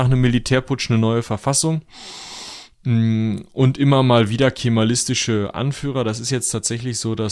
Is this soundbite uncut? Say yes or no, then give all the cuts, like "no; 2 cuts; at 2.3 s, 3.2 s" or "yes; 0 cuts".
yes; 0 cuts